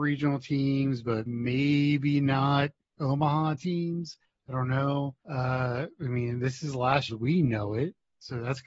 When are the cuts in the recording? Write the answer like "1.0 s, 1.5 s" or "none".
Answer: 1.3 s, 4.2 s, 5.2 s, 7.1 s